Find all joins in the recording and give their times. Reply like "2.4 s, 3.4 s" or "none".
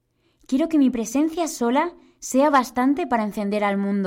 none